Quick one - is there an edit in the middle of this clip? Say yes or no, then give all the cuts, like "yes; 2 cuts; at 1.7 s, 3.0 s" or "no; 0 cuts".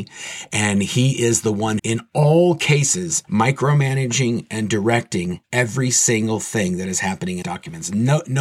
yes; 4 cuts; at 1.8 s, 3.2 s, 5.4 s, 7.4 s